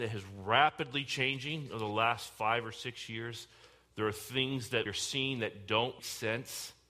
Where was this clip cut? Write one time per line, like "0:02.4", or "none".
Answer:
0:04.9
0:06.0

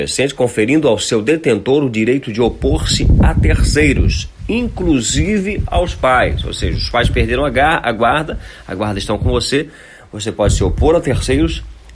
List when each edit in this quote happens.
none

